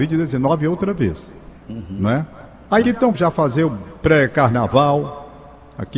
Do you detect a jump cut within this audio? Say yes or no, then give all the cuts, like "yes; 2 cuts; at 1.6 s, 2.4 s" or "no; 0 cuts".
yes; 3 cuts; at 1.6 s, 2.8 s, 3.1 s